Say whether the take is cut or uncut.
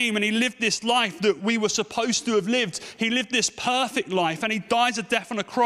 uncut